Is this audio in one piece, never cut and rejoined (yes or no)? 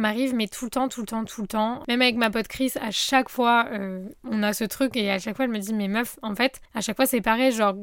no